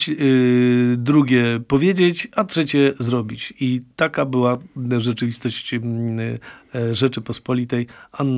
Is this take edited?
no; 0 cuts

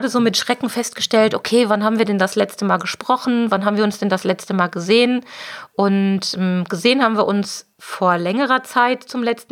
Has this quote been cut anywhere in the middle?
yes; 1 cut; at 7.7 s

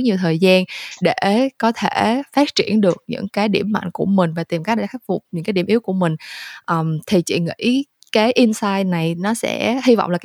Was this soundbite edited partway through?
no; 0 cuts

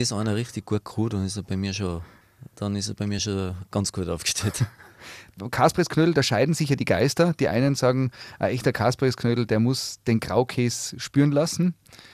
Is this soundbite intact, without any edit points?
yes; 0 cuts

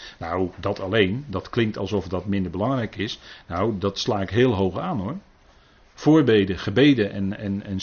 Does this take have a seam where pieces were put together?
no; 0 cuts

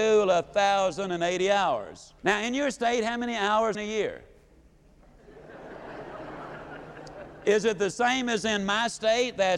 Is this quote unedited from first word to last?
no; 2 cuts; at 2.2 s, 3.7 s

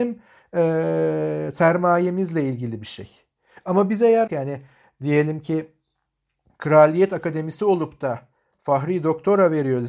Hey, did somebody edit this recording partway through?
yes; 1 cut; at 4.3 s

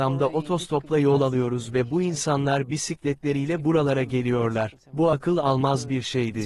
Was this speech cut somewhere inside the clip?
no; 0 cuts

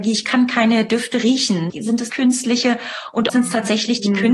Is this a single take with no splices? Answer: no; 3 cuts; at 1.7 s, 2.1 s, 3.3 s

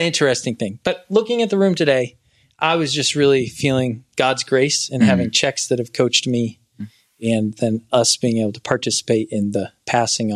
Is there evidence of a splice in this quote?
no; 0 cuts

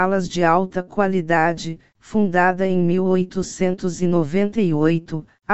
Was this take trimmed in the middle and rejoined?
no; 0 cuts

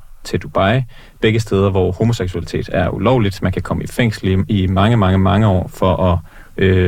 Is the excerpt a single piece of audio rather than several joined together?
yes; 0 cuts

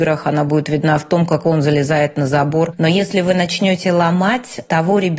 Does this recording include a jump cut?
yes; 1 cut; at 1.4 s

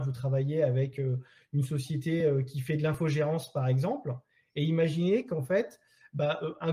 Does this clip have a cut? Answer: no; 0 cuts

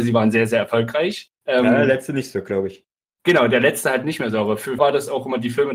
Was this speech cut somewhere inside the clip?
yes; 2 cuts; at 1.4 s, 4.8 s

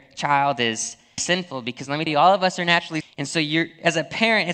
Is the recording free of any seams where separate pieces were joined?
no; 3 cuts; at 1.2 s, 2.1 s, 3.0 s

